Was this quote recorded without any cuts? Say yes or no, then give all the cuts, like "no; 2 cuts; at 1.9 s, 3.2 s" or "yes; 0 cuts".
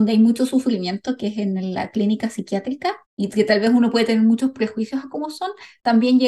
no; 1 cut; at 3.0 s